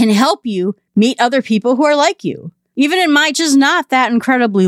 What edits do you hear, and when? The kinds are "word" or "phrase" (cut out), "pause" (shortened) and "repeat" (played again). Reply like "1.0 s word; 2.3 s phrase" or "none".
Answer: 3.3 s phrase

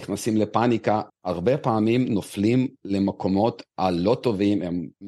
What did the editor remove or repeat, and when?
1.1 s word

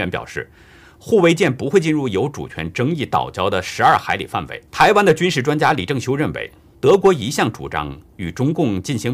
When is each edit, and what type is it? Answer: 4.7 s pause; 6.7 s pause

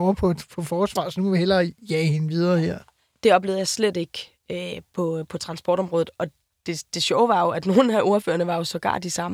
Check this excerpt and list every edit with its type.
none

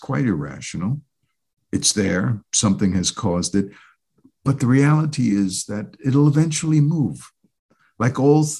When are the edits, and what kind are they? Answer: none

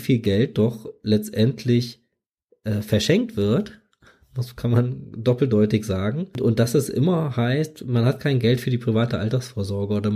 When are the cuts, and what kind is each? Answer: none

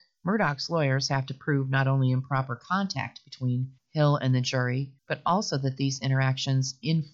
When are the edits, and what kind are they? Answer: 3.8 s pause; 5.0 s pause

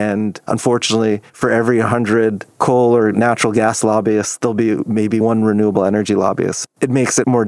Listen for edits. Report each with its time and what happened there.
1.3 s pause

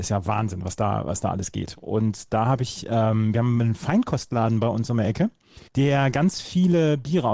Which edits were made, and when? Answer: 5.7 s pause

